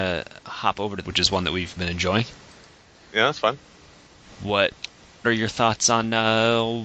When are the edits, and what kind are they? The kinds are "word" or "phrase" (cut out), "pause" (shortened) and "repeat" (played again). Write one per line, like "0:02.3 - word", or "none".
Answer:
0:01.0 - word
0:01.8 - word
0:05.2 - word